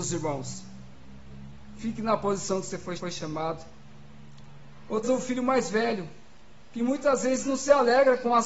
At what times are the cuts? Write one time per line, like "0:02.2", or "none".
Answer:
0:03.0
0:05.0

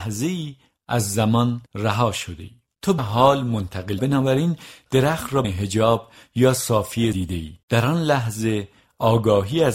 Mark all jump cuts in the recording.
0:01.7
0:03.0
0:04.0
0:05.4
0:07.1
0:07.6

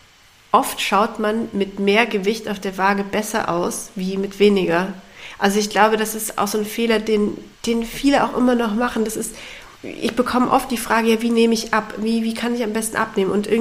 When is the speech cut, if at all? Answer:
0:07.5
0:09.8

